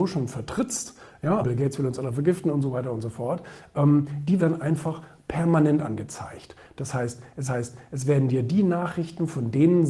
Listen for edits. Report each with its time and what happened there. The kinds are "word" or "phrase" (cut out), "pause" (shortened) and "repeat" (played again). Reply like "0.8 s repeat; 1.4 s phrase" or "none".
1.4 s word; 4.4 s phrase; 7.5 s repeat